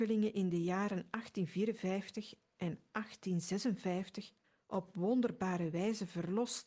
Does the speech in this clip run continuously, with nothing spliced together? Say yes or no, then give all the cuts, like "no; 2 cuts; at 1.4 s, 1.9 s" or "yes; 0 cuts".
no; 1 cut; at 4.4 s